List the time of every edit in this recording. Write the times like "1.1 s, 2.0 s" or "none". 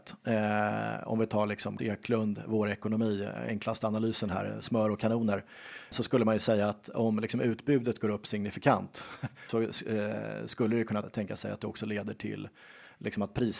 1.8 s, 5.9 s, 9.5 s, 11.0 s